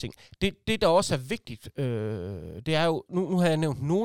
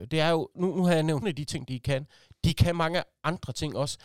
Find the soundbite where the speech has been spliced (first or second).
second